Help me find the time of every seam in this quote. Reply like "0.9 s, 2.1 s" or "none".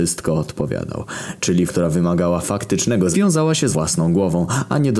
1.7 s, 3.1 s, 3.7 s